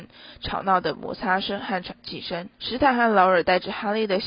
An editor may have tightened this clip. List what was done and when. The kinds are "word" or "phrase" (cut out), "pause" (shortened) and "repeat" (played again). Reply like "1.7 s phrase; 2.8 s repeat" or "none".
2.5 s pause